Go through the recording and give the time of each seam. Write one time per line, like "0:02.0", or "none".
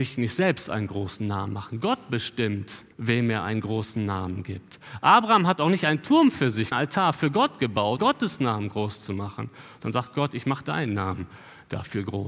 0:02.9
0:06.7
0:08.0